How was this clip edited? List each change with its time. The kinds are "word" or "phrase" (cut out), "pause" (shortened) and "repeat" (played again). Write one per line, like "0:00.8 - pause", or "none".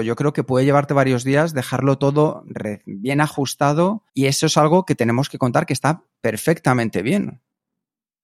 0:04.1 - pause